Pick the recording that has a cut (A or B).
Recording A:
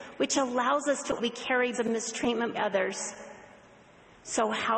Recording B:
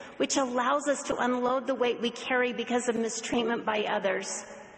A